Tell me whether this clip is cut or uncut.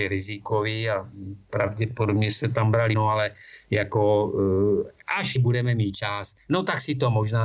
cut